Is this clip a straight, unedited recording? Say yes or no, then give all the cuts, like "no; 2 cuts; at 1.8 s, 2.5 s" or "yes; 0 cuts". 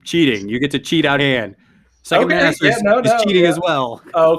no; 1 cut; at 1.2 s